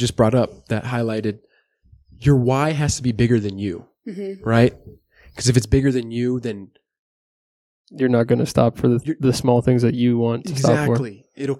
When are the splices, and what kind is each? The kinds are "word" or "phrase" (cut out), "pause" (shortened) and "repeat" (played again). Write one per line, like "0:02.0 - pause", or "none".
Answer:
none